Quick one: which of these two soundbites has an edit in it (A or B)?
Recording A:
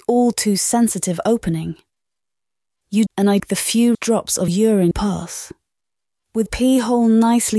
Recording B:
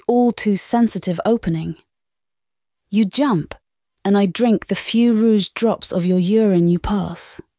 A